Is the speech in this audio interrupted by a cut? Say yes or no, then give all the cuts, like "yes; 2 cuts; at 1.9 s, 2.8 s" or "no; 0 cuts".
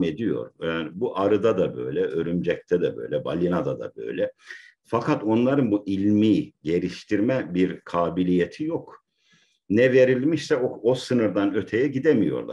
no; 0 cuts